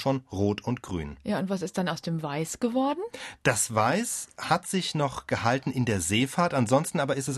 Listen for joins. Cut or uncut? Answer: uncut